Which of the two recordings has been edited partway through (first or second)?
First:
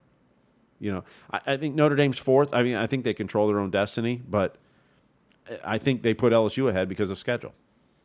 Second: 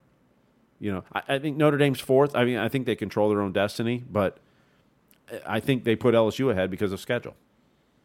second